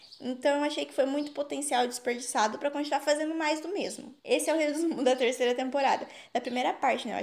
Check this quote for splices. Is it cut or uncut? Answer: uncut